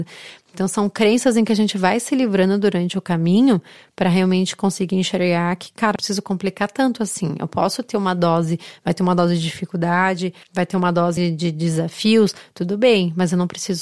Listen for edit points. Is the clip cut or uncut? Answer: cut